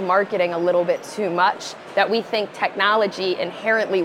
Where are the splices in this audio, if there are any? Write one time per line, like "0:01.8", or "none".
none